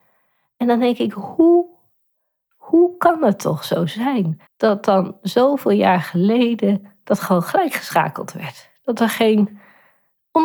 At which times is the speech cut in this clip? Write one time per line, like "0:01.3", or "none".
0:04.5

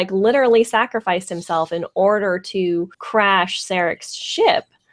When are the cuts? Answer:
0:02.9

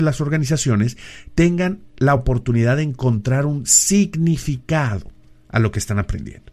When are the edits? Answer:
none

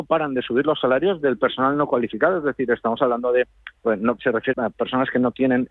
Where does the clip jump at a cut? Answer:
0:03.8
0:04.2
0:04.5

